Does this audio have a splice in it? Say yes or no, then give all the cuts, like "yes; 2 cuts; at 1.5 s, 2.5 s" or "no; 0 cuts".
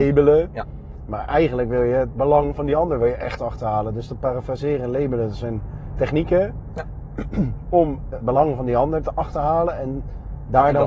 yes; 1 cut; at 8.2 s